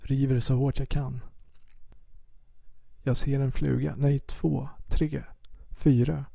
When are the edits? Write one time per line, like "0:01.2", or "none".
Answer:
none